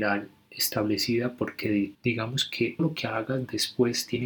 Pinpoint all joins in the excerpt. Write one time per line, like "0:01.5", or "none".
0:01.9
0:02.8